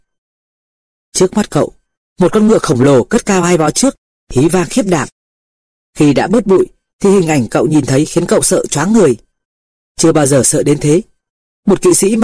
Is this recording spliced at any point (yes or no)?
no